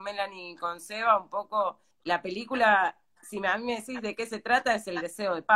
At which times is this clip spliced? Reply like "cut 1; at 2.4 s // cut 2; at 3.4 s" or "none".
cut 1; at 1.9 s